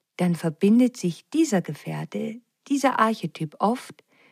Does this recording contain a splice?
no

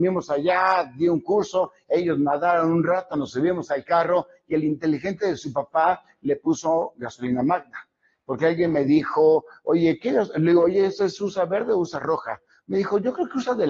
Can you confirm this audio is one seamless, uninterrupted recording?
yes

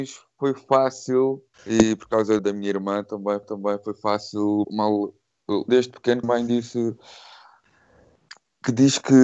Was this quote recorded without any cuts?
no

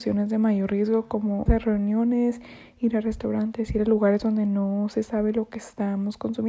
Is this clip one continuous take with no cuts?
no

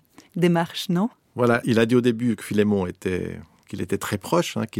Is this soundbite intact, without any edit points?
no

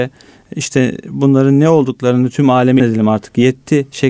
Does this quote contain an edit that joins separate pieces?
yes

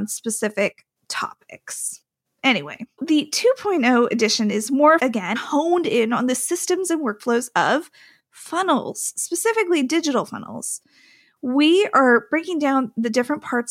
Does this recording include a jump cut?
yes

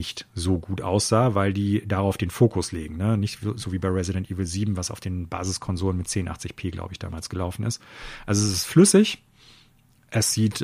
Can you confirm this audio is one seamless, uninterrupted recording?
yes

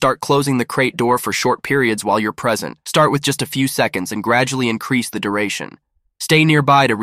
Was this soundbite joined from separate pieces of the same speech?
yes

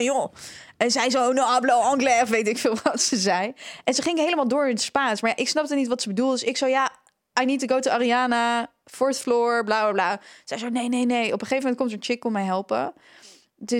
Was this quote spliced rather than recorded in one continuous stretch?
no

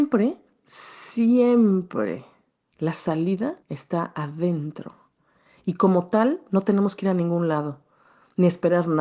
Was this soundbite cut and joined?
yes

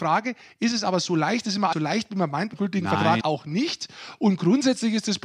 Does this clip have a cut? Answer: yes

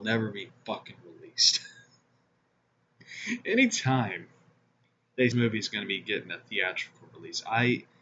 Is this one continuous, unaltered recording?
no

